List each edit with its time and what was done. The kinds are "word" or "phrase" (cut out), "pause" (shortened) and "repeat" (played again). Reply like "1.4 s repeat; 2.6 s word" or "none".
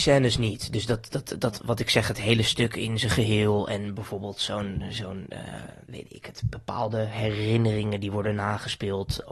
5.8 s pause